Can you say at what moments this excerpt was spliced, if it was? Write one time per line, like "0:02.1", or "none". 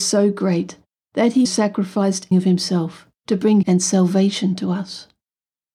0:01.4
0:02.3
0:03.1
0:03.6